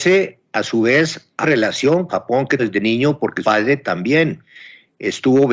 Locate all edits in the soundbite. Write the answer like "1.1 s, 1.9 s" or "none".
1.4 s, 2.1 s, 2.6 s, 3.4 s